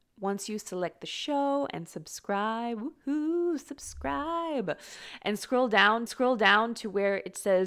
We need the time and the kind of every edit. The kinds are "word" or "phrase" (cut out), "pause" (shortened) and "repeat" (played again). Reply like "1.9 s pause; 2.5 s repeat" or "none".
6.1 s repeat

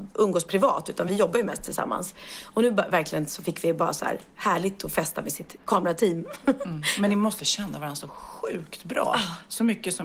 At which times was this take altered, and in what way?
none

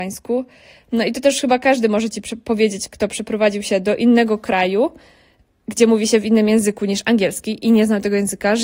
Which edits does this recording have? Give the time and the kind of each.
none

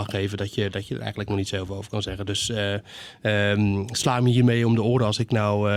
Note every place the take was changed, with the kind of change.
none

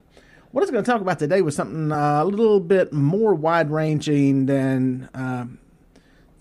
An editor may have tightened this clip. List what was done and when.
none

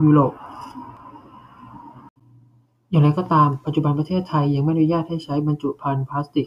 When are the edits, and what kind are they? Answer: none

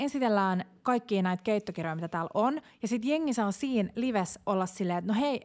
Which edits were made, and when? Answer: none

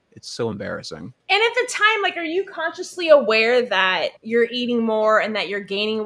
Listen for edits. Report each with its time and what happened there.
1.2 s pause; 4.2 s pause

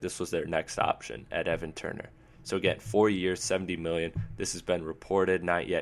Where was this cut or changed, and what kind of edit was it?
none

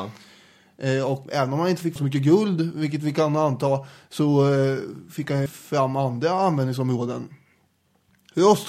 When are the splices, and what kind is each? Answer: 1.3 s word; 2.0 s word; 5.5 s word

